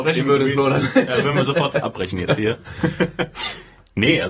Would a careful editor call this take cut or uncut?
uncut